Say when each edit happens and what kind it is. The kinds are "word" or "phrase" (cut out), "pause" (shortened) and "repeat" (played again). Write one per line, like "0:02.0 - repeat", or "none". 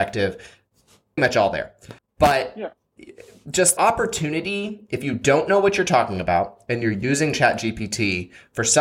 0:01.2 - word
0:02.0 - pause
0:03.8 - word